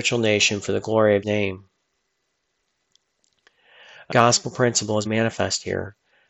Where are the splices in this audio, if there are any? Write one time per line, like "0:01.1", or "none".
0:01.2
0:04.1
0:05.1